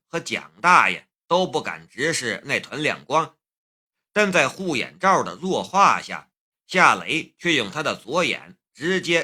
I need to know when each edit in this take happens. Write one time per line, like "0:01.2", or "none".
none